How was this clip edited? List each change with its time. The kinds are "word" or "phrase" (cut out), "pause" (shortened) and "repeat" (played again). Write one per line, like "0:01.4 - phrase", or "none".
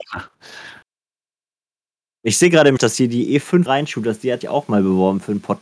0:02.8 - word
0:03.7 - word
0:04.4 - word